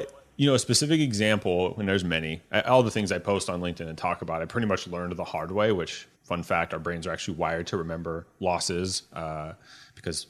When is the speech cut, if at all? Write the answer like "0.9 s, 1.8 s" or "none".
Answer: 6.1 s